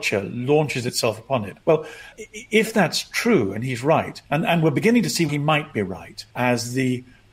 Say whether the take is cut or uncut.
cut